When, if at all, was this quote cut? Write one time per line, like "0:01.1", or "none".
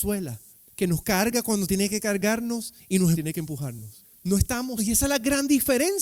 0:03.1
0:04.8